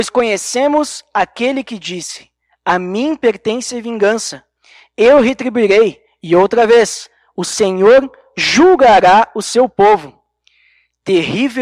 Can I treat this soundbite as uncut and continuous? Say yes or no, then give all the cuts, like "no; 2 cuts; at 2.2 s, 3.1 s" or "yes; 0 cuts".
yes; 0 cuts